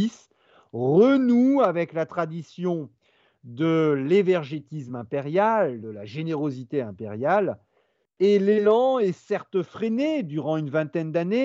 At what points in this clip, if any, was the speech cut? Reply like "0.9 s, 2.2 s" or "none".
none